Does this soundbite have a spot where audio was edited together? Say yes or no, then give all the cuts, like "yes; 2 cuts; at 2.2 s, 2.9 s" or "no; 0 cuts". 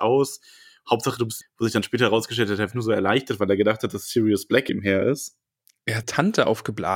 yes; 4 cuts; at 1.4 s, 2.7 s, 4.7 s, 6.0 s